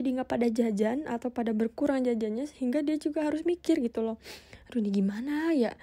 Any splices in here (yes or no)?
no